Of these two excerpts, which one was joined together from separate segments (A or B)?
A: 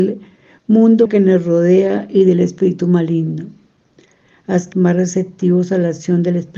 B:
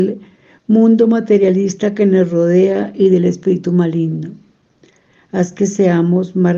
A